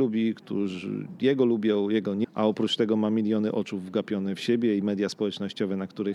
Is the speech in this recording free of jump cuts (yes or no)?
no